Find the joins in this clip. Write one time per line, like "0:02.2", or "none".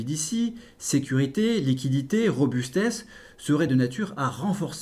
none